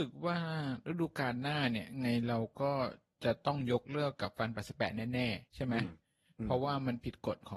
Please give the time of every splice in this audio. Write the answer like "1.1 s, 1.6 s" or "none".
5.5 s